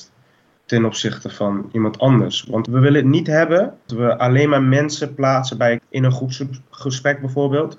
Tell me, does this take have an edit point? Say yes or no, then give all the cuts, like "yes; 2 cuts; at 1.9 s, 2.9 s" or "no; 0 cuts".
yes; 2 cuts; at 3.9 s, 5.8 s